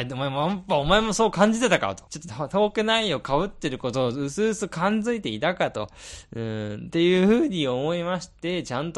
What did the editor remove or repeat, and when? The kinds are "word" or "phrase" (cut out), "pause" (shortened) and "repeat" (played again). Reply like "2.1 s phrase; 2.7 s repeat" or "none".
2.1 s pause

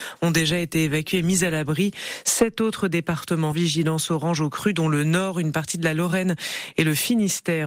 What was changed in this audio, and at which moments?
3.5 s phrase

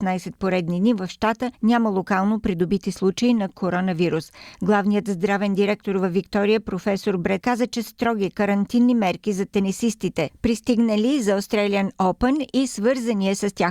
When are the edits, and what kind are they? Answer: 1.5 s pause; 7.4 s word; 7.9 s word

